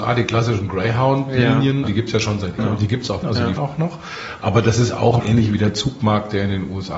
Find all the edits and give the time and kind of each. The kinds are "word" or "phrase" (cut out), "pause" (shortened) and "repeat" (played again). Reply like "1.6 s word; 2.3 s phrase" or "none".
1.8 s word; 2.6 s word; 3.2 s word; 3.6 s word; 5.2 s word